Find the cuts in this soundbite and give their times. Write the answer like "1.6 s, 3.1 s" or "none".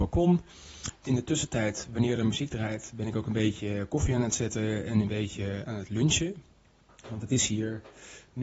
none